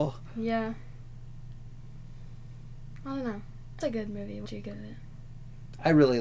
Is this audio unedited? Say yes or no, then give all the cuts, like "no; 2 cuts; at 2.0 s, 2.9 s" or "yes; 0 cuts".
no; 2 cuts; at 3.8 s, 4.5 s